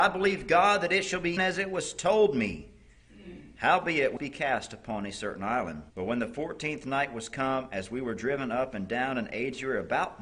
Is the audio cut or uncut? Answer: cut